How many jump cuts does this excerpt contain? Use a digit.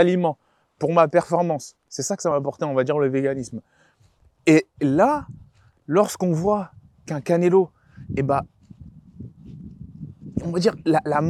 0